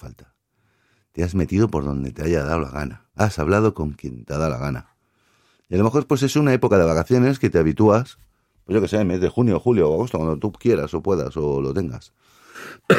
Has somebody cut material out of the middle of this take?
yes; 1 cut; at 3.1 s

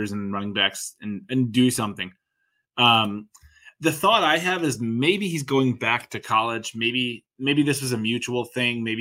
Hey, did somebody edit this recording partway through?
no; 0 cuts

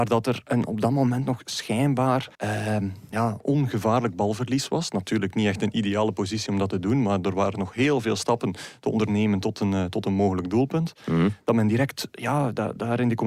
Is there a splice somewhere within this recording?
yes; 1 cut; at 2.3 s

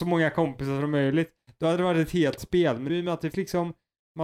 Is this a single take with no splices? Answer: no; 3 cuts; at 2.4 s, 2.9 s, 3.3 s

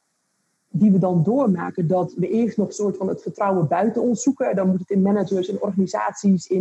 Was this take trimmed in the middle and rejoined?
no; 0 cuts

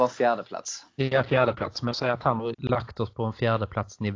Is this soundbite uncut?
no; 2 cuts; at 1.9 s, 2.5 s

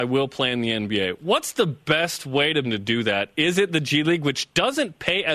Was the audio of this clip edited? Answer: yes; 1 cut; at 2.6 s

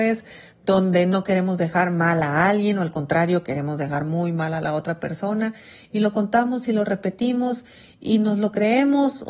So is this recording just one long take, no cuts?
yes; 0 cuts

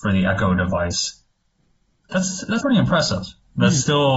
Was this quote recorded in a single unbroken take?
no; 1 cut; at 2.6 s

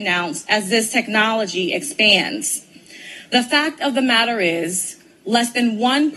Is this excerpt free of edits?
yes; 0 cuts

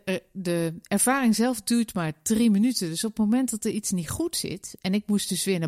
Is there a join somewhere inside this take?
no; 0 cuts

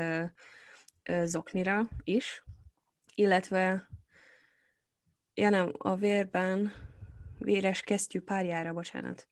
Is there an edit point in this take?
no; 0 cuts

